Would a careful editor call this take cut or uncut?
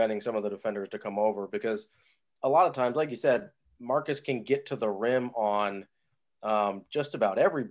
uncut